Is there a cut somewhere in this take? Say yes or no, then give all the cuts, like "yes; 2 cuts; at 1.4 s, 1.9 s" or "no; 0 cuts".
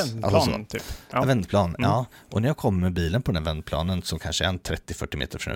no; 0 cuts